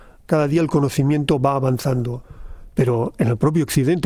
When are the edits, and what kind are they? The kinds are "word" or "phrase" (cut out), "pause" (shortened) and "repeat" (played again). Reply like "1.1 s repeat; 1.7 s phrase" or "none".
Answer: none